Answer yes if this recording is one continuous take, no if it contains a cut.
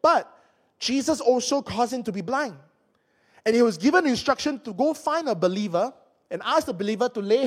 yes